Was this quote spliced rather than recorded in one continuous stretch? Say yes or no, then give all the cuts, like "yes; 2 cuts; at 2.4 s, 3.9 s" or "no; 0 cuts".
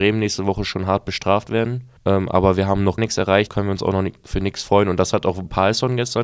yes; 3 cuts; at 2.0 s, 3.0 s, 3.5 s